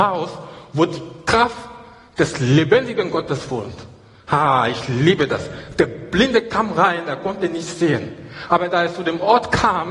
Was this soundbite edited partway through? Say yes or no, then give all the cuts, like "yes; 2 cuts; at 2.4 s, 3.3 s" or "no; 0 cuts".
no; 0 cuts